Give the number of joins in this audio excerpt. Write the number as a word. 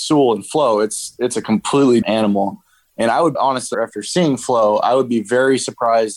three